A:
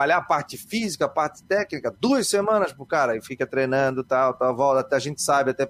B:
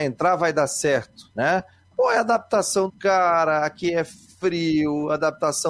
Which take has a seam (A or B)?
B